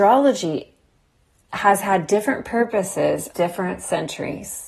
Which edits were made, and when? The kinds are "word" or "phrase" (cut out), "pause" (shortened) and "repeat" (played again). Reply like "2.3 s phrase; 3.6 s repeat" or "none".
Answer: 3.3 s word

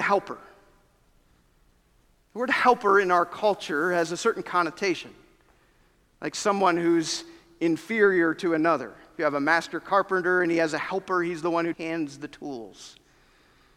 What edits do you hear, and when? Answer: 11.7 s word

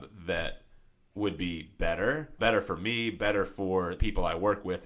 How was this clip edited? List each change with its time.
2.4 s word; 4.0 s word

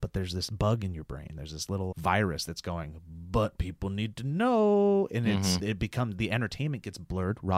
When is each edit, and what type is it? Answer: 1.9 s word; 5.6 s word

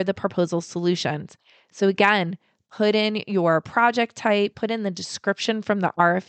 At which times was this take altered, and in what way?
none

